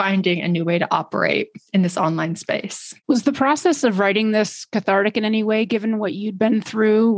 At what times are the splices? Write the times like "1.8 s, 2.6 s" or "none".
1.7 s, 3.0 s